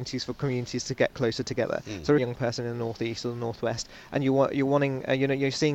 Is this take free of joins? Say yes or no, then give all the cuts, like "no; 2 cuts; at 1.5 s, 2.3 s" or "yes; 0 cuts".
no; 1 cut; at 2.2 s